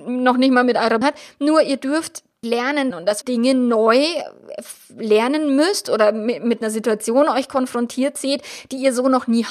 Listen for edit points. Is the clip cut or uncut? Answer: cut